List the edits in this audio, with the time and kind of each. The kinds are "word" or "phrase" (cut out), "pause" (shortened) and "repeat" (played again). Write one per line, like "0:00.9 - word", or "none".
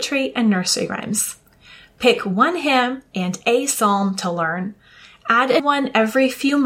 0:05.6 - word